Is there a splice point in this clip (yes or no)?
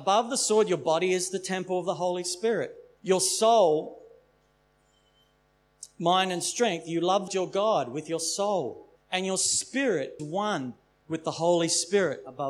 yes